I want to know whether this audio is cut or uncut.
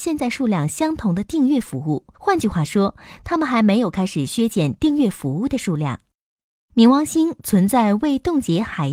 cut